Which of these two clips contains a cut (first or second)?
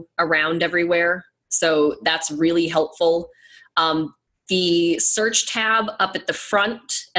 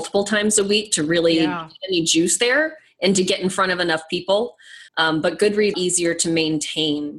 second